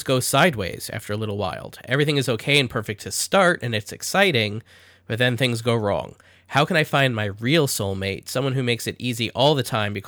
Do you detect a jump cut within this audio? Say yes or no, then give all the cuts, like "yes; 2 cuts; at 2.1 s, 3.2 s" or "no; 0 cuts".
no; 0 cuts